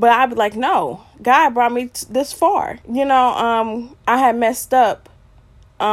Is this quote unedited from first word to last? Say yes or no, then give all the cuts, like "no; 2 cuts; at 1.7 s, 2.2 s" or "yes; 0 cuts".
no; 1 cut; at 2.8 s